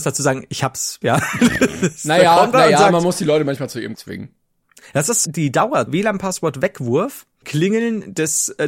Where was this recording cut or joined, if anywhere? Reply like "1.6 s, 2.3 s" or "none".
1.0 s, 2.5 s, 3.9 s, 5.2 s, 5.9 s, 7.4 s